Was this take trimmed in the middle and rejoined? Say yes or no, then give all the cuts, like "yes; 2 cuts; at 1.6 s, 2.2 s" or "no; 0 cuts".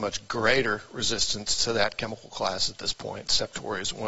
no; 0 cuts